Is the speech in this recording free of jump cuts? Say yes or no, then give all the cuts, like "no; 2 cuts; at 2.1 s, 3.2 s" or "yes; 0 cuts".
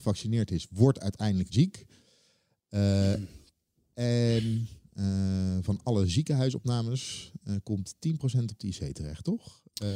no; 1 cut; at 1.5 s